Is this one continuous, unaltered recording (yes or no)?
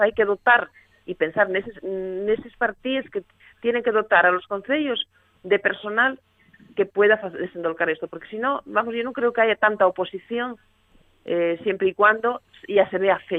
yes